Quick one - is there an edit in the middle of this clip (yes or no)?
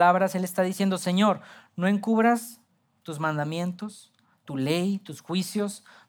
no